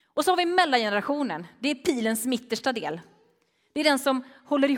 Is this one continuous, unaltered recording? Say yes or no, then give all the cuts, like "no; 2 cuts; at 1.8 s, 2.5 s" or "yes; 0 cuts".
yes; 0 cuts